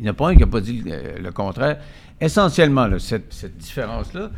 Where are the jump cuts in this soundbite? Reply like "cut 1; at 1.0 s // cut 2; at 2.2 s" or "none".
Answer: cut 1; at 3.3 s